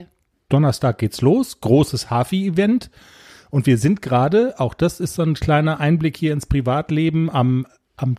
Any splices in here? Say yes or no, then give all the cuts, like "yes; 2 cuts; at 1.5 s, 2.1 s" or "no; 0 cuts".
no; 0 cuts